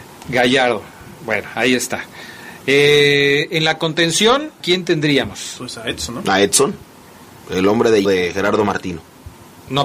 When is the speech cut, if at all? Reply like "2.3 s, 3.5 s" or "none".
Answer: 4.6 s, 8.0 s